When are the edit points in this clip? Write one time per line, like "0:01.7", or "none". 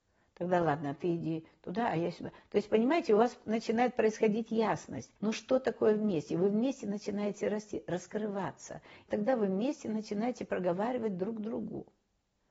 0:05.2
0:09.1